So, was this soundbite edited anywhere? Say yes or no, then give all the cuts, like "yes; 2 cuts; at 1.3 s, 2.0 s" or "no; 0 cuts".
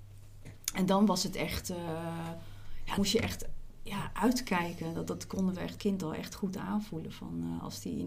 yes; 2 cuts; at 3.0 s, 5.8 s